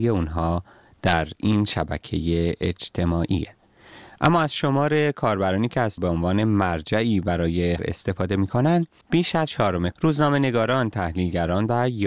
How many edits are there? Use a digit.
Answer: 4